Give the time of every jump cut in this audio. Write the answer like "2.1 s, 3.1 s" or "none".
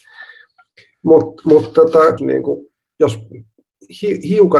2.2 s